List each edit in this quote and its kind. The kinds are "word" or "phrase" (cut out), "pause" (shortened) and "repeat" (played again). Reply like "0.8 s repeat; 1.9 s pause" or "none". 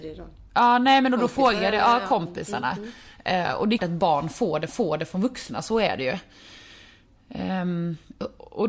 3.8 s word; 4.7 s repeat